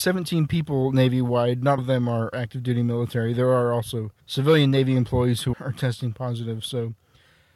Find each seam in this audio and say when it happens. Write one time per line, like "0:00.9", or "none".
0:01.8
0:02.3
0:04.2
0:05.5